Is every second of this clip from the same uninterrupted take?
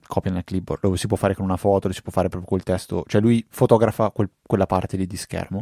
yes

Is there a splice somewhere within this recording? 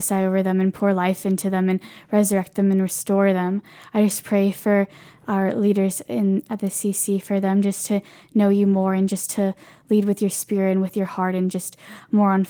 no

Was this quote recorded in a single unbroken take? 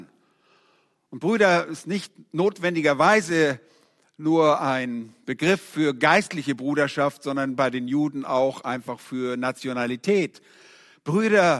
yes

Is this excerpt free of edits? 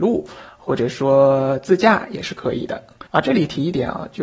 no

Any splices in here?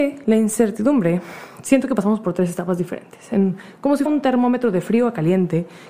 yes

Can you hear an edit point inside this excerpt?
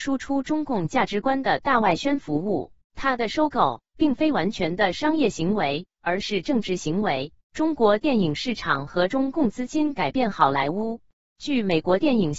yes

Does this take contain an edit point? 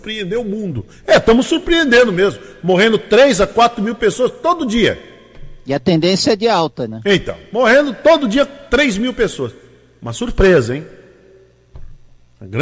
no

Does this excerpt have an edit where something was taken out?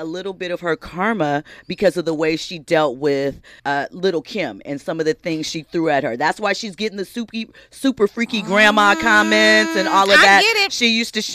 yes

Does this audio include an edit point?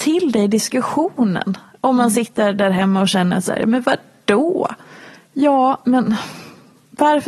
no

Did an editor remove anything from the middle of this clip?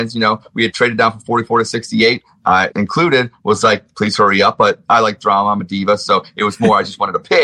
yes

